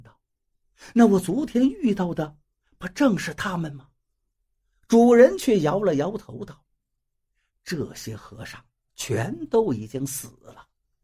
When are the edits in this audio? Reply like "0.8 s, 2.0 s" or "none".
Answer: none